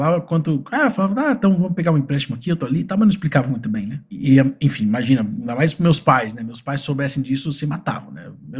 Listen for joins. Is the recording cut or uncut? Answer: uncut